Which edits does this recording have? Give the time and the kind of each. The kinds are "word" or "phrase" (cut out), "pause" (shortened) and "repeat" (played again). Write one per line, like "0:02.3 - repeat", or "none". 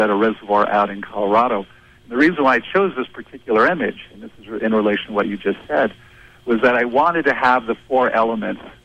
none